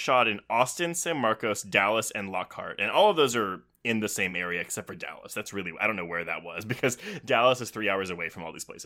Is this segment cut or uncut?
uncut